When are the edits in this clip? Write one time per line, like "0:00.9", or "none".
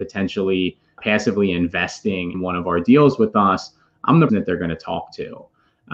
0:01.0
0:02.3
0:04.3